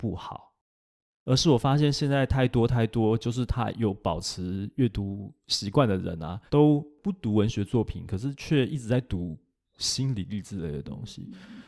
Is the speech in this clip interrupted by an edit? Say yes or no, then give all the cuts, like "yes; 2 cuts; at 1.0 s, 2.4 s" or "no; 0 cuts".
yes; 1 cut; at 6.5 s